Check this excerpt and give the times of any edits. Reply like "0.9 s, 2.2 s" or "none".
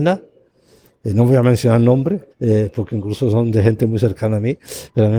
2.3 s